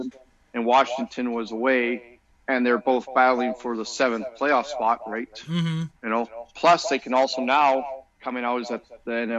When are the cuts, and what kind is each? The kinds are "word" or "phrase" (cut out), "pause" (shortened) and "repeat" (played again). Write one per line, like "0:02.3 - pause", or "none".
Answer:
0:02.3 - pause
0:06.0 - pause